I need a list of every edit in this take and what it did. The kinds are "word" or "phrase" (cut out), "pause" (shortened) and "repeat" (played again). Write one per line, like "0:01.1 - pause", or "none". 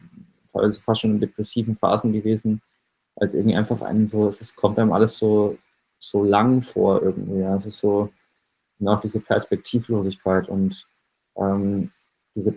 none

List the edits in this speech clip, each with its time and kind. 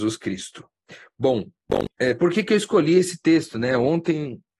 none

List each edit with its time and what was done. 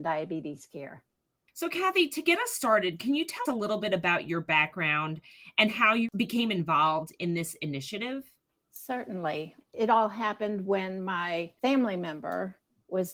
0:03.5 - word

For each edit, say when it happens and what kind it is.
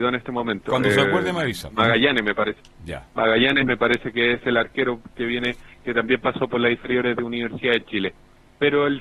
0:03.1 - pause

